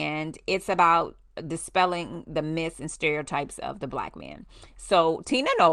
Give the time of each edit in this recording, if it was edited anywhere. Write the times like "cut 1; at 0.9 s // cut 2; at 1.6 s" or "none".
none